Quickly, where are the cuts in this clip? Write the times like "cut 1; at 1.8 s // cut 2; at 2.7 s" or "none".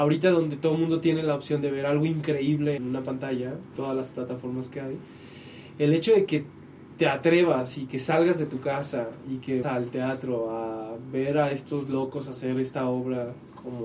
cut 1; at 2.8 s // cut 2; at 3.8 s // cut 3; at 9.6 s